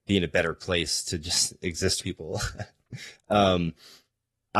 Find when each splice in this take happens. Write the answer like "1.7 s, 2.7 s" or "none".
2.0 s